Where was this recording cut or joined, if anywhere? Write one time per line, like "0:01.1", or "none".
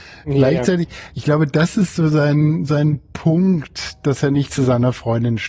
none

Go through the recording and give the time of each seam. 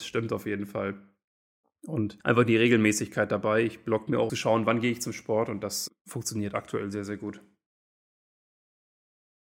0:02.2
0:04.3
0:05.9

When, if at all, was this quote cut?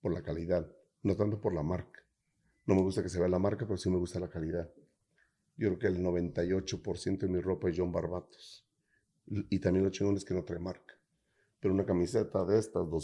none

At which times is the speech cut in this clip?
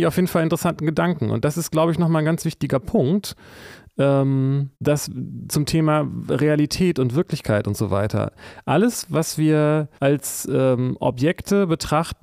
0:04.7
0:10.0

